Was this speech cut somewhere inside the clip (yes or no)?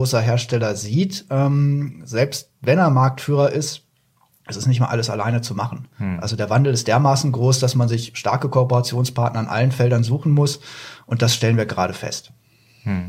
no